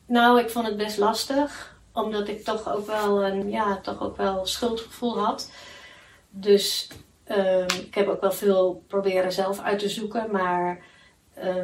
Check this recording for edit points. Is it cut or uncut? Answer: cut